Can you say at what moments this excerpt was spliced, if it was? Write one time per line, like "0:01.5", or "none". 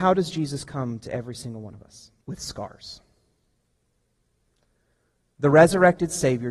0:02.2